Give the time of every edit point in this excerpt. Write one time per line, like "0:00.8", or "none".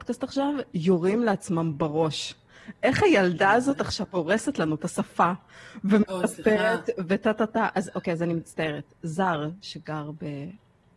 none